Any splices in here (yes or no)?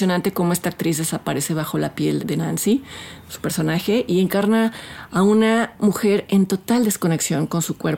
yes